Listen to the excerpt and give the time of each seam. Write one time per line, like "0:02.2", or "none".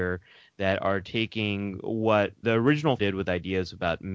0:02.4
0:03.0